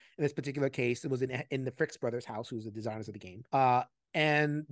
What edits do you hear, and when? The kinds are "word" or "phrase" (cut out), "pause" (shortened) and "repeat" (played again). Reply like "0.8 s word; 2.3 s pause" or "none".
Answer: 3.5 s pause